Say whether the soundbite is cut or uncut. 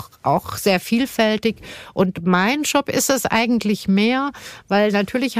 uncut